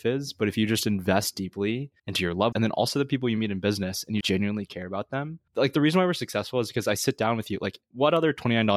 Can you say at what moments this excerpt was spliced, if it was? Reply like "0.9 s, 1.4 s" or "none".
2.0 s, 2.5 s, 4.2 s, 5.5 s